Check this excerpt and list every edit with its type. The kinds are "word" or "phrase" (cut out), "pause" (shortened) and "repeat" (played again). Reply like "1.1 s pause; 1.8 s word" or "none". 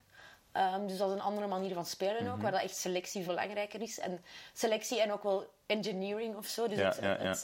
3.2 s word

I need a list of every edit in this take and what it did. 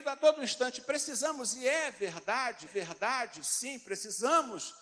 2.7 s repeat

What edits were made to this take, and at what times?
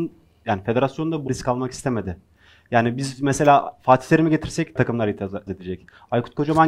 1.3 s word; 4.8 s word; 5.5 s word

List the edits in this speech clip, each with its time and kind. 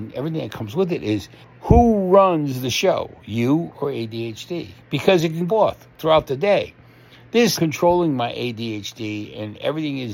1.4 s pause; 5.5 s phrase; 7.5 s phrase

